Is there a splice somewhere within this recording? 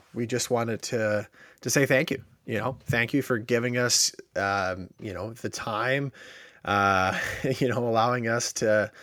no; 0 cuts

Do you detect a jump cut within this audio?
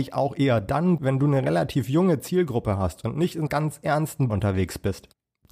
yes; 3 cuts; at 1.0 s, 3.5 s, 4.3 s

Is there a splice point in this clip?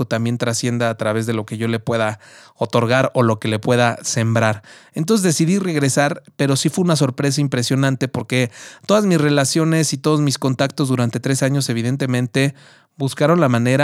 no; 0 cuts

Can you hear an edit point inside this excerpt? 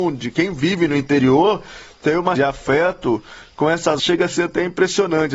yes; 2 cuts; at 2.3 s, 4.0 s

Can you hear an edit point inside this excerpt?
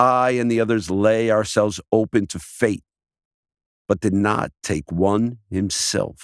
no; 0 cuts

